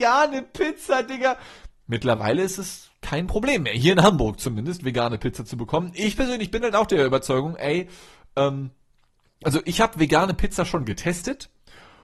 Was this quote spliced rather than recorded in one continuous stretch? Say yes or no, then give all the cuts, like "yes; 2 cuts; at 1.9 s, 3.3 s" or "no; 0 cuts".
no; 0 cuts